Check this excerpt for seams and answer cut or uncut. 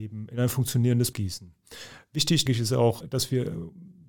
cut